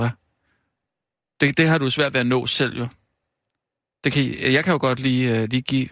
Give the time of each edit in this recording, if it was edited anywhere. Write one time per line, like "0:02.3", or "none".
none